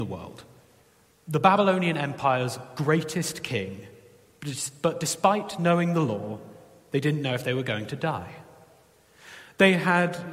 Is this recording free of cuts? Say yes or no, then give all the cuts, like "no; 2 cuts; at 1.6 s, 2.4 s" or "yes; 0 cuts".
yes; 0 cuts